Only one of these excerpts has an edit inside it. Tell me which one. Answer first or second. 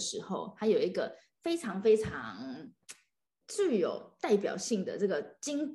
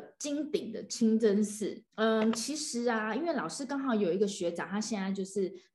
second